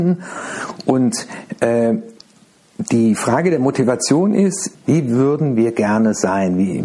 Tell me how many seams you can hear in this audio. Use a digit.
2